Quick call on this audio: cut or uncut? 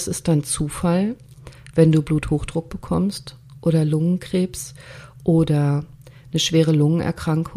uncut